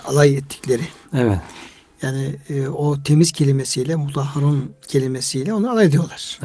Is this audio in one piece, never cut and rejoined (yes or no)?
yes